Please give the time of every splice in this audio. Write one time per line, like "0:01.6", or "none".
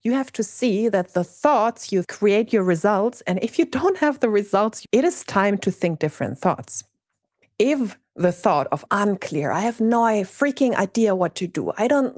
0:02.0
0:04.8
0:07.4
0:08.9